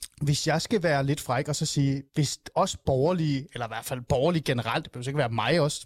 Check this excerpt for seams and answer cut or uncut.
cut